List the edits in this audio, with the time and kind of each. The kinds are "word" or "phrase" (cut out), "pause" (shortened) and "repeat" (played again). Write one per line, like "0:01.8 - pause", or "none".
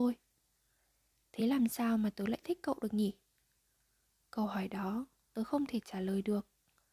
none